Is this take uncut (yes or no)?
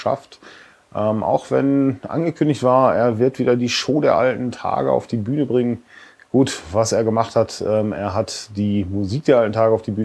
yes